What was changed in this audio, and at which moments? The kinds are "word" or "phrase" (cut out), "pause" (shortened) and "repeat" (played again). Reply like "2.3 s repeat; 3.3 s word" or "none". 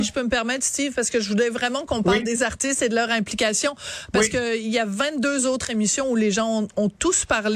none